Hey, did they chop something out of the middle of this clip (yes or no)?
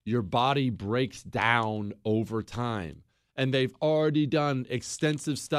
no